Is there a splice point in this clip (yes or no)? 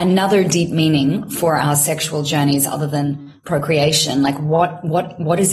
no